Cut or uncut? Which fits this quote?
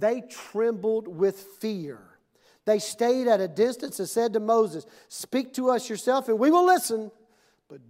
uncut